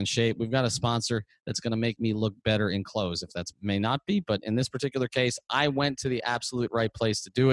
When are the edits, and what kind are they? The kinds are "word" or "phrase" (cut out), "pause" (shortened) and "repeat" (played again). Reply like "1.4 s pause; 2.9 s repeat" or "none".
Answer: 3.5 s word

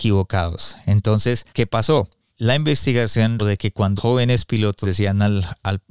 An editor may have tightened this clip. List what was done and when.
1.5 s pause; 2.3 s pause; 3.4 s word; 4.0 s word; 4.8 s word

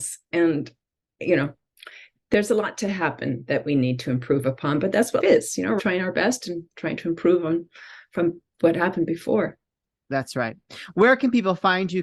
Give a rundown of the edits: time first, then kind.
5.2 s word; 5.8 s word

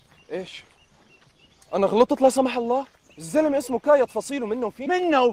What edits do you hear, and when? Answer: 3.0 s pause

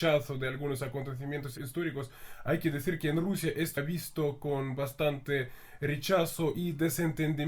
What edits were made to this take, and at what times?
3.8 s word

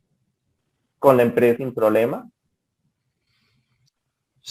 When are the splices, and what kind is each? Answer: 1.6 s word

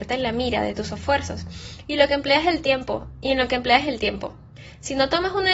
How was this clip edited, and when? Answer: none

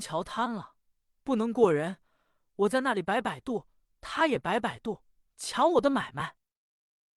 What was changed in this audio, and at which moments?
none

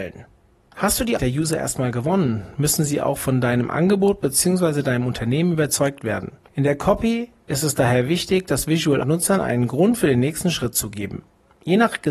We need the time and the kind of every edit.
1.2 s word; 6.5 s pause; 9.0 s phrase

